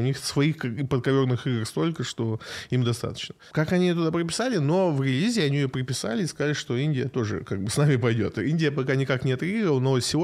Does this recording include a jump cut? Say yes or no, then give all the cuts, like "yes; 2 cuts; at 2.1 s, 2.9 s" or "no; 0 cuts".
no; 0 cuts